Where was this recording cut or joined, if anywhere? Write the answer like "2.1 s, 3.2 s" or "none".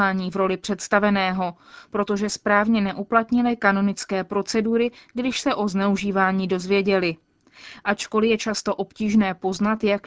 none